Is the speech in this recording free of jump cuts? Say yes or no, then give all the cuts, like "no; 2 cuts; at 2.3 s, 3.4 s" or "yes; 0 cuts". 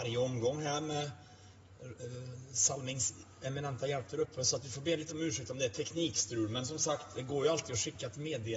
yes; 0 cuts